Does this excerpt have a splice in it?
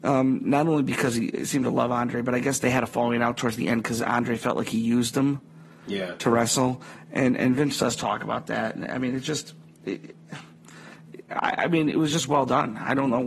no; 0 cuts

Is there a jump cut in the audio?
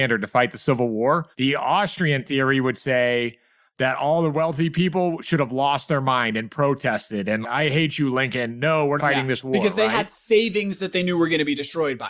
yes; 3 cuts; at 1.3 s, 7.4 s, 9.0 s

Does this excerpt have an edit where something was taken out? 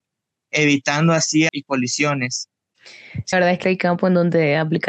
yes; 3 cuts; at 1.5 s, 3.3 s, 3.6 s

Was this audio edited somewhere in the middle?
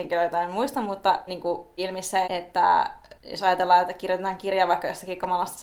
yes; 4 cuts; at 1.3 s, 1.8 s, 2.2 s, 3.2 s

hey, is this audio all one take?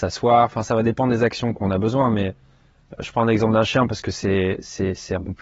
yes; 0 cuts

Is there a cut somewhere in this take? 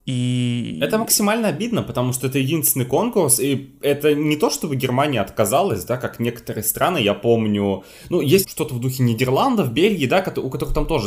yes; 1 cut; at 8.4 s

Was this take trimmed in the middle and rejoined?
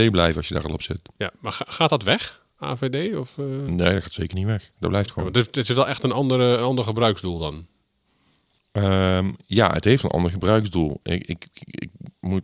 no; 0 cuts

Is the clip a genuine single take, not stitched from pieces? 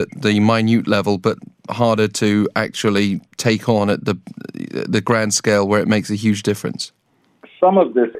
yes; 0 cuts

